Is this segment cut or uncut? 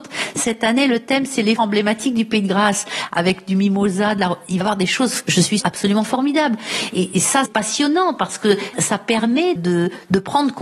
cut